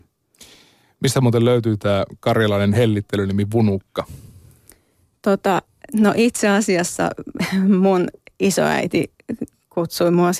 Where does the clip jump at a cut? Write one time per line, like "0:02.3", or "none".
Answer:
none